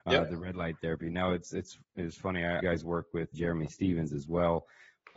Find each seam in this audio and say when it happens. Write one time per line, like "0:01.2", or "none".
0:02.6
0:03.3

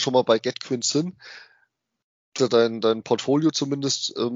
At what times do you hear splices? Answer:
0:02.4

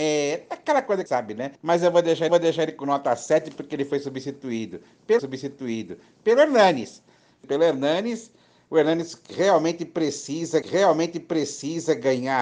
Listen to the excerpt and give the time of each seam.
0:01.1
0:01.5
0:02.3
0:05.2
0:07.4
0:10.6

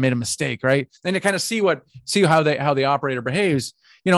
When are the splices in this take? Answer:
0:01.0

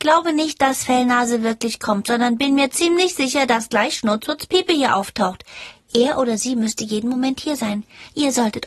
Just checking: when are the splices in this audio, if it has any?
none

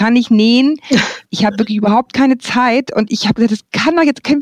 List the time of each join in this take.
none

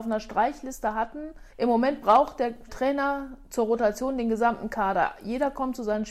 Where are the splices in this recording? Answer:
0:01.5

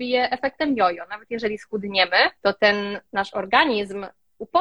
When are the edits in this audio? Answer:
0:02.4
0:03.1

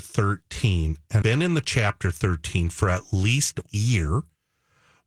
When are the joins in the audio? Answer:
0:01.2
0:03.7

